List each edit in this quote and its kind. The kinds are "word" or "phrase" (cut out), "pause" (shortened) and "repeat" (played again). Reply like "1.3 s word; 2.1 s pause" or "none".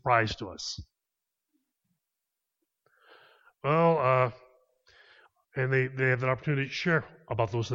none

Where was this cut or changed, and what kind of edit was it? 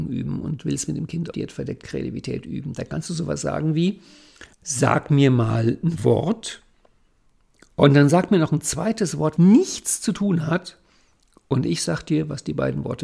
1.3 s word; 4.5 s pause; 9.4 s phrase

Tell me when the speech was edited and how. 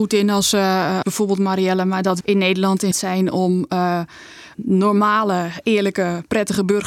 1.0 s word; 2.2 s word; 2.9 s word; 4.5 s word

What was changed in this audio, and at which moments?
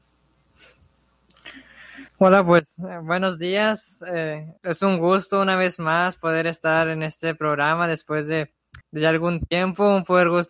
2.1 s pause; 4.6 s pause; 8.8 s pause

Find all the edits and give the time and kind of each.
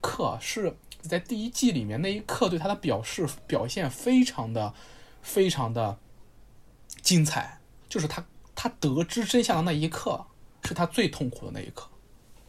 1.0 s word; 7.8 s pause

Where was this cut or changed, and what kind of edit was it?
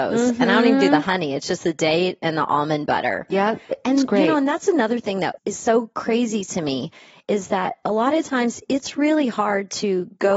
none

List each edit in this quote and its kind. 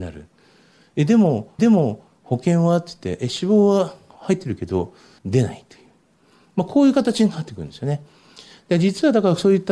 1.6 s repeat

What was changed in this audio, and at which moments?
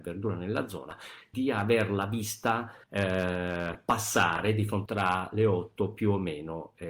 1.3 s word; 2.8 s pause; 4.9 s phrase

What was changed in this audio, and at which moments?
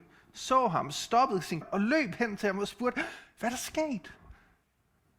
1.6 s word

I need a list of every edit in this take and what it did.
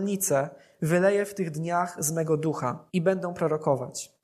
2.9 s pause

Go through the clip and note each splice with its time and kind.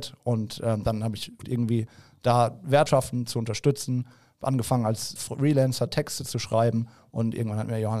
1.4 s word; 2.9 s word; 5.2 s word

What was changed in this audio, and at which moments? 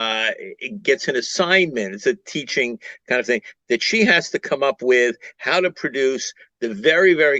none

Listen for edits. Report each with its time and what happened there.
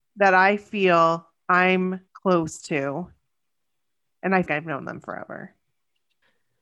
2.1 s pause; 4.5 s phrase

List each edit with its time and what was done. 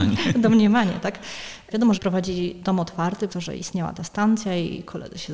1.9 s phrase; 3.3 s word

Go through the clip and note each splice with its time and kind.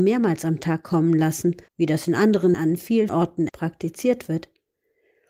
1.7 s pause; 2.5 s word; 3.1 s word; 3.5 s word

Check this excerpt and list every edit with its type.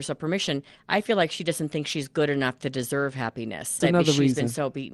3.8 s word

